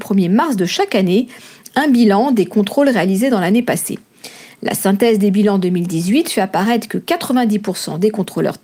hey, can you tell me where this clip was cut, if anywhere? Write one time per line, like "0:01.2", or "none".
none